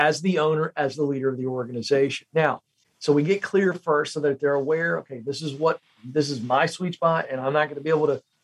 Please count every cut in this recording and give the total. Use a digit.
0